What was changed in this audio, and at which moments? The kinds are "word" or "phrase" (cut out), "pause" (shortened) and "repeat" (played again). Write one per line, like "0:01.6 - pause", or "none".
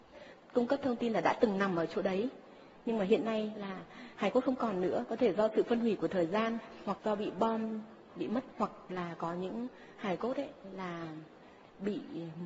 0:07.0 - word
0:08.1 - word
0:08.5 - word